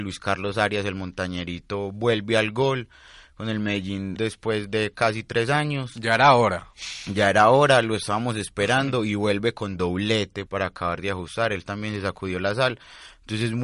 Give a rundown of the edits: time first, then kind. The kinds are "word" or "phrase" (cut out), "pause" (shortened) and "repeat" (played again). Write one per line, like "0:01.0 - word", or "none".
0:04.2 - word
0:10.5 - word

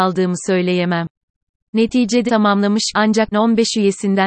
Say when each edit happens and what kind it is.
0:02.3 - word
0:02.9 - word
0:03.3 - word

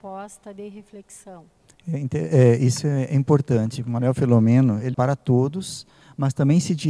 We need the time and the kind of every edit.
0:04.9 - word

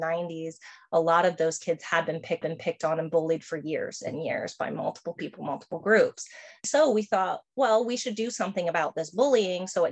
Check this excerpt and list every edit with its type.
0:02.4 - repeat

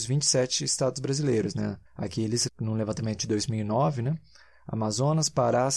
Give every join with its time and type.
0:01.9 - pause
0:02.5 - word

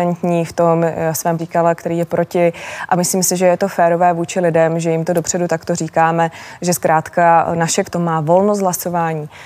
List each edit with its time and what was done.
0:01.4 - phrase
0:07.8 - word

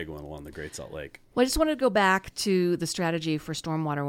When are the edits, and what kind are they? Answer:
none

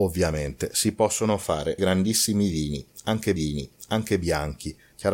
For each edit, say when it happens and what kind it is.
0:01.8 - word
0:03.4 - repeat

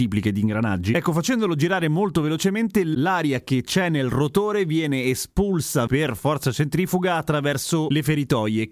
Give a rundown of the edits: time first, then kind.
0:05.9 - word

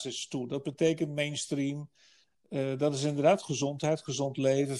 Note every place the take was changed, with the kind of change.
none

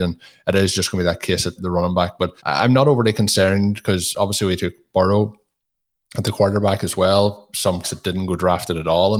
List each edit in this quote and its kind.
0:01.6 - word
0:02.4 - pause
0:07.8 - word

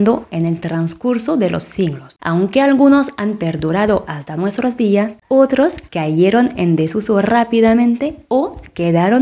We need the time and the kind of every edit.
0:05.9 - pause
0:08.2 - pause

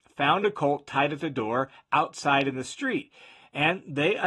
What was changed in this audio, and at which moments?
none

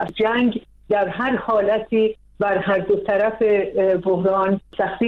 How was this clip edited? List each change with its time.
none

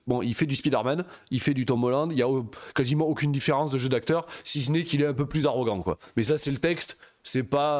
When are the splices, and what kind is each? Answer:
none

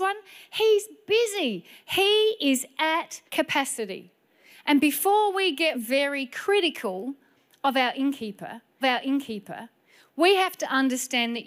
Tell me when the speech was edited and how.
0:03.3 - pause
0:05.7 - word
0:08.8 - repeat

